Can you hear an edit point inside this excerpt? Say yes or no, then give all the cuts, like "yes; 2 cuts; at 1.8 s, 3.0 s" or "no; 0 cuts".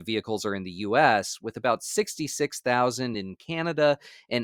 no; 0 cuts